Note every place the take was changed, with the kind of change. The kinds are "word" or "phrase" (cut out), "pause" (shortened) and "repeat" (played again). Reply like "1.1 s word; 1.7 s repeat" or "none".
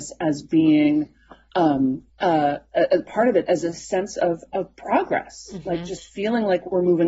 2.1 s pause